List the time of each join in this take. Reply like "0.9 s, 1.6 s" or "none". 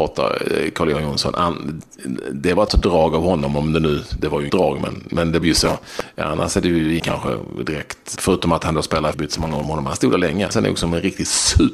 2.7 s, 4.5 s, 5.4 s, 7.0 s, 8.2 s, 9.1 s, 10.5 s